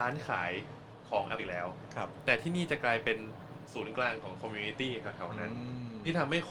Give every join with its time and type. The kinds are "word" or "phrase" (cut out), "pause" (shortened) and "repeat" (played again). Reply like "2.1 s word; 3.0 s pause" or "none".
1.4 s word